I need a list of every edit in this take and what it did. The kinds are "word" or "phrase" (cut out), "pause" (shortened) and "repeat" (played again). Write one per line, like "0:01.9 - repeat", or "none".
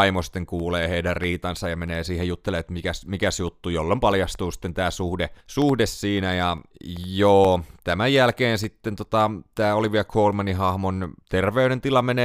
0:05.4 - pause
0:11.2 - pause

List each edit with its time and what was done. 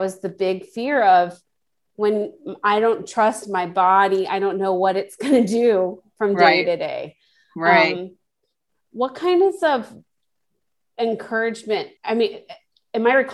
0:12.0 - pause

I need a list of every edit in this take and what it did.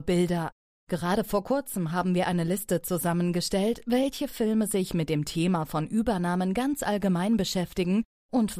none

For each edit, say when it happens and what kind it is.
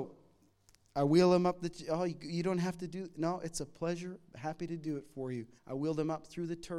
0:05.6 - pause

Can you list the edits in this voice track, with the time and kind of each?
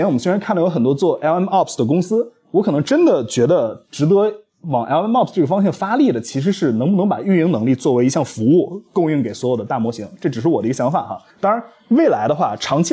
0:11.3 - pause

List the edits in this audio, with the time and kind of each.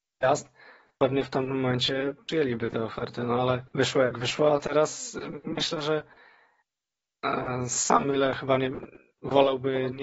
0:03.7 - pause

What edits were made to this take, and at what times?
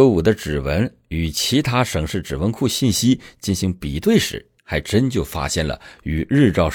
0:04.6 - pause

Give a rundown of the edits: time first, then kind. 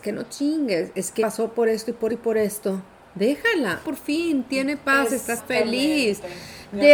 0:01.2 - word
0:02.1 - word
0:03.8 - word
0:05.4 - word

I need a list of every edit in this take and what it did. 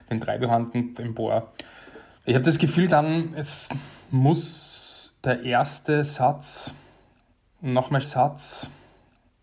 0:00.9 - word
0:02.2 - pause
0:02.9 - word
0:05.2 - pause
0:08.0 - repeat

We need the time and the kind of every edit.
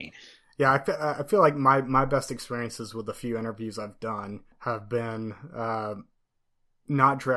0:04.5 - pause

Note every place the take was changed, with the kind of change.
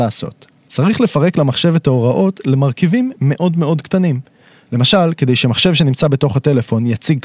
none

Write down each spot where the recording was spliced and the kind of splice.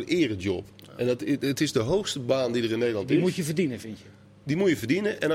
none

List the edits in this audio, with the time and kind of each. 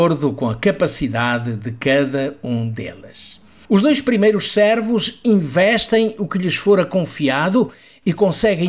none

